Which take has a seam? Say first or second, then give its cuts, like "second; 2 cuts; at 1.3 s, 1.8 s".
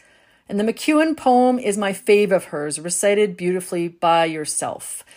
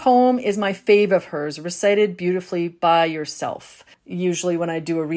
second; 1 cut; at 3.9 s